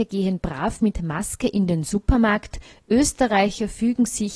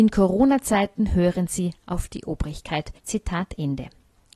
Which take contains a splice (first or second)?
second